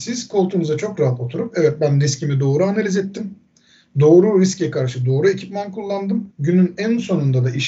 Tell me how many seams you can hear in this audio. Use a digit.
1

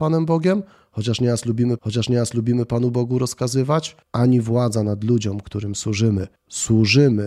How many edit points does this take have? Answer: 3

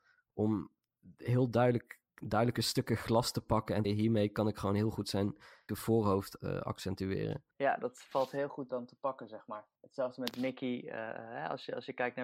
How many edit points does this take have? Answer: 6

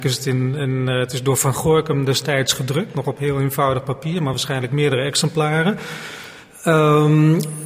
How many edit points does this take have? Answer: 0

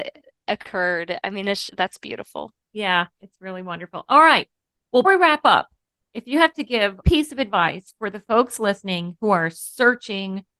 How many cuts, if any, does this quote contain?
3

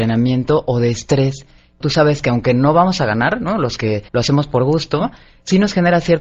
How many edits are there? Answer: 2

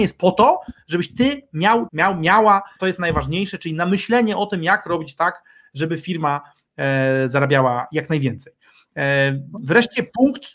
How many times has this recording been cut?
2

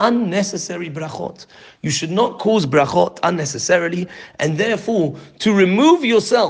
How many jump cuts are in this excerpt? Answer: 0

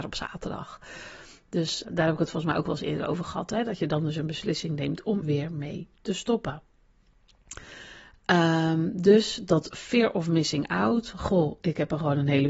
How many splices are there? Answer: 2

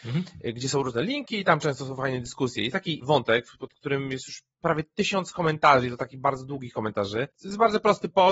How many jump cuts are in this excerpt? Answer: 1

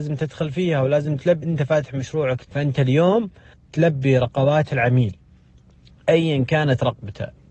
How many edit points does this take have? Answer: 3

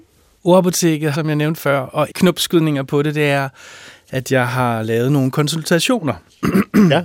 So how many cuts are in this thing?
2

